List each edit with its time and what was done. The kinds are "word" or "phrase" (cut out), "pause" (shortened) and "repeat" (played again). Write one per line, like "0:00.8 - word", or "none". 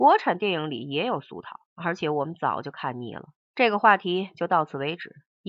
0:01.6 - pause
0:03.4 - pause

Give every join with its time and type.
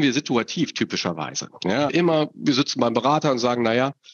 0:01.9 - word

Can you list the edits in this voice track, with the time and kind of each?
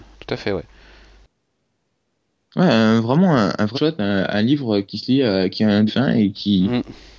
0:03.7 - word
0:05.9 - phrase

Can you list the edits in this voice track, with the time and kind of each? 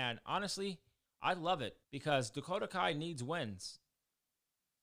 0:01.8 - pause

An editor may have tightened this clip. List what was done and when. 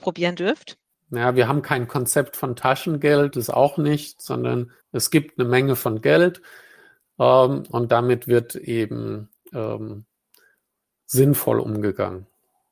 0:00.9 - pause
0:03.3 - phrase
0:04.8 - pause

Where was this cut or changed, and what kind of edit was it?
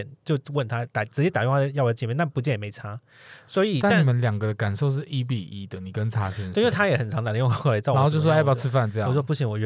none

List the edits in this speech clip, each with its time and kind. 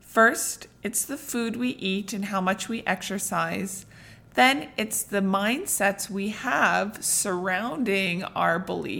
none

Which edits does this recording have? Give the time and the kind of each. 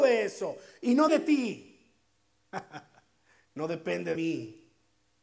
0:01.1 - word
0:04.2 - word

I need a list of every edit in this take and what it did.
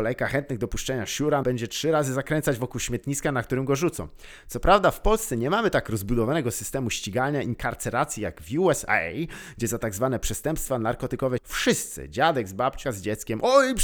0:01.4 - word
0:11.4 - word
0:12.8 - word

